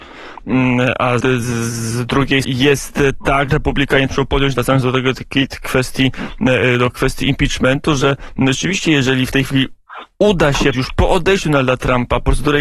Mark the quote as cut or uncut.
cut